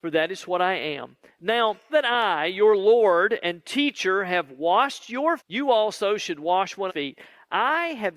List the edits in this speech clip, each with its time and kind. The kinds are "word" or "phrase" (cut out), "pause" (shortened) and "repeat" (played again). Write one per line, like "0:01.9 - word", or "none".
0:01.9 - word
0:05.4 - word
0:06.9 - word